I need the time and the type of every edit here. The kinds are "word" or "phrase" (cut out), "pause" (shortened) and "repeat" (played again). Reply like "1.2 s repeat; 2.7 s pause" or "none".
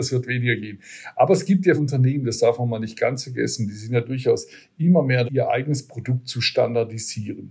1.8 s word; 5.2 s word